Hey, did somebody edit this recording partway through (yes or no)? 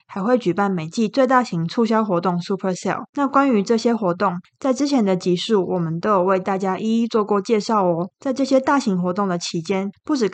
yes